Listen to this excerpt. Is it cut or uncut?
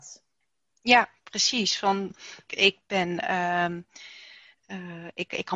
cut